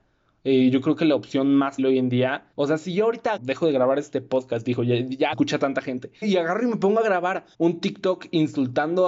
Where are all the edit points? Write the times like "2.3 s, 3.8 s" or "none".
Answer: 1.8 s, 2.5 s, 3.4 s, 5.3 s, 6.2 s, 7.5 s